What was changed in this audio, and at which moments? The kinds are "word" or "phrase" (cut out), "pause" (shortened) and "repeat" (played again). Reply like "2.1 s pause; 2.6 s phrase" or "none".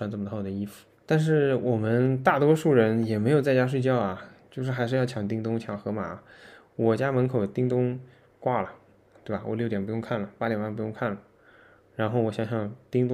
0.9 s pause